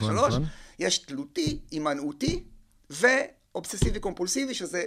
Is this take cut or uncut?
uncut